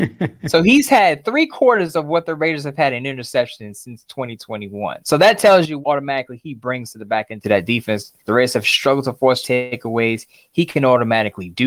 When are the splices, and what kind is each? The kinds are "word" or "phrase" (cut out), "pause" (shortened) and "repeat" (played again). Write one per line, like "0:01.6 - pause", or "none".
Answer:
0:05.0 - pause
0:05.8 - word
0:08.2 - pause
0:09.4 - phrase